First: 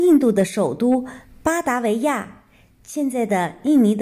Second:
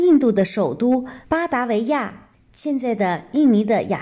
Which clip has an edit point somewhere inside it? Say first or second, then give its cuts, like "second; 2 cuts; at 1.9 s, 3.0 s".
second; 2 cuts; at 1.2 s, 2.3 s